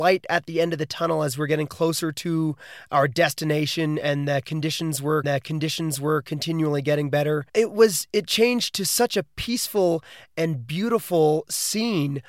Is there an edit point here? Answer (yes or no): yes